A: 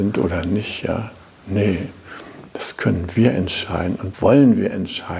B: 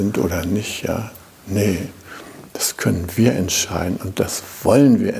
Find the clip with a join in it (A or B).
A